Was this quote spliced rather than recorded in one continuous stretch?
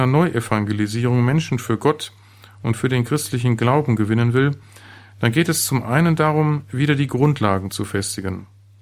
no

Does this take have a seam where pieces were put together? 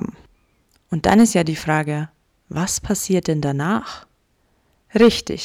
no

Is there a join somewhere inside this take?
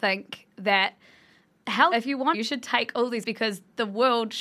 yes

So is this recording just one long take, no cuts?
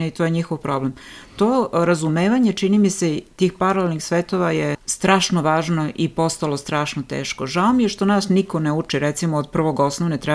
no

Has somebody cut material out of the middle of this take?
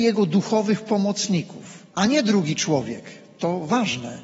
yes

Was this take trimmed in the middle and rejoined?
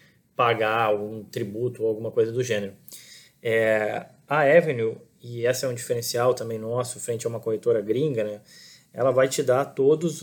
no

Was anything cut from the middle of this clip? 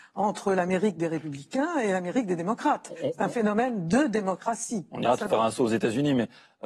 yes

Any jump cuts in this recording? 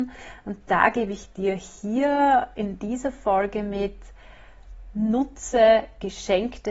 no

